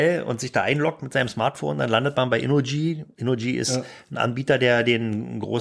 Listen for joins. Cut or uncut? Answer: uncut